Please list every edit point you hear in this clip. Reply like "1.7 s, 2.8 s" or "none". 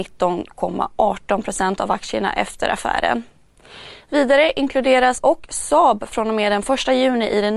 5.2 s